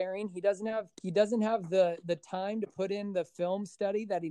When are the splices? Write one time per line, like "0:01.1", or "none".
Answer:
0:00.9